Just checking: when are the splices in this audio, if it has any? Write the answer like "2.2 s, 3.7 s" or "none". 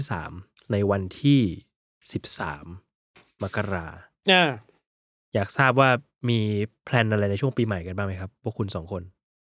none